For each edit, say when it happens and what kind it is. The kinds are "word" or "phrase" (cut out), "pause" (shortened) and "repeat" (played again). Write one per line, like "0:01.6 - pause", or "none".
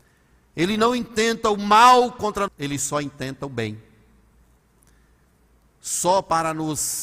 0:02.5 - word